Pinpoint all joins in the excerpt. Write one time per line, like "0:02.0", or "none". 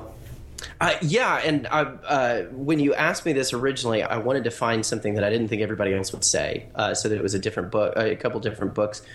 0:04.1